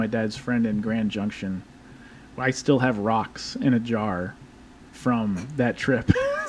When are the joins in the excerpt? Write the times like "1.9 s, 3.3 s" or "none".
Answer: none